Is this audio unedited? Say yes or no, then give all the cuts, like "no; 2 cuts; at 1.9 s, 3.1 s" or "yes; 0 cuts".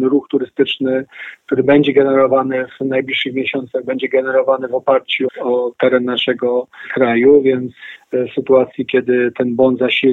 no; 1 cut; at 5.3 s